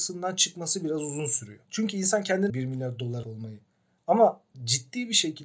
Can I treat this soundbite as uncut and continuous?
no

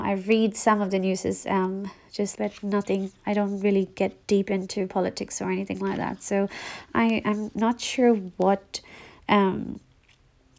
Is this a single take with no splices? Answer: no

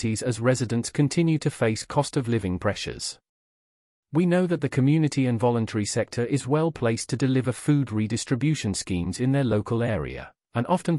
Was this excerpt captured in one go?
yes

